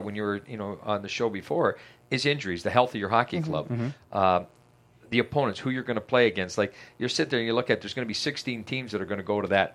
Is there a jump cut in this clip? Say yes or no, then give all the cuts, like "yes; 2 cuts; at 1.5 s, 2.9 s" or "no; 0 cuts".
no; 0 cuts